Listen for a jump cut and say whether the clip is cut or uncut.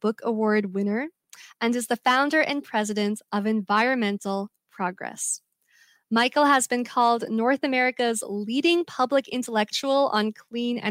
uncut